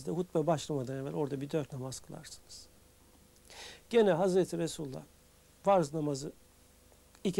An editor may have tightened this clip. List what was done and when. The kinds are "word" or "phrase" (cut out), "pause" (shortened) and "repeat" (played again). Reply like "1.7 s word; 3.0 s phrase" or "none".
1.7 s word